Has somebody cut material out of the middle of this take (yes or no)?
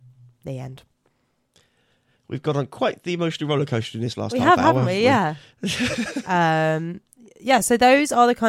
no